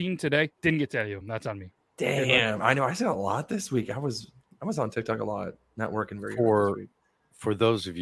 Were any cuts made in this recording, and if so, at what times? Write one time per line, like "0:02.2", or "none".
none